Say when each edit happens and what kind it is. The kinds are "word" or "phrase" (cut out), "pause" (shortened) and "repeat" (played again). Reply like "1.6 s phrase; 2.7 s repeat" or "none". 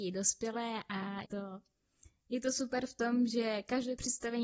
1.2 s word